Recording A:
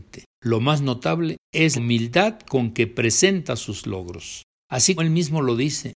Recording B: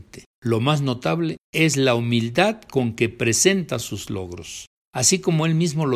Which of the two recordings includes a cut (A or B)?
A